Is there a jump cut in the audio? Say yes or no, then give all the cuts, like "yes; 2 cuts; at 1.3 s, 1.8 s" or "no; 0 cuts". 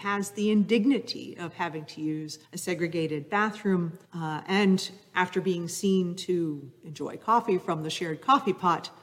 yes; 2 cuts; at 2.4 s, 4.0 s